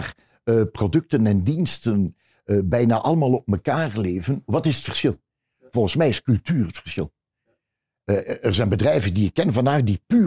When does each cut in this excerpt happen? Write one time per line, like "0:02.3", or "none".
none